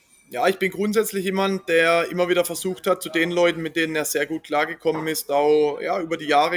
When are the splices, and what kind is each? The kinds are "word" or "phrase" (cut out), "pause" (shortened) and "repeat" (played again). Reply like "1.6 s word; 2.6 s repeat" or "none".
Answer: none